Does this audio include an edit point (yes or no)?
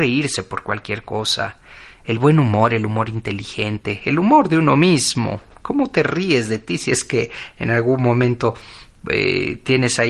no